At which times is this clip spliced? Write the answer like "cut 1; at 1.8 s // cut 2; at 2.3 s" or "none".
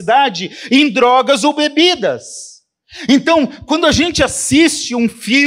none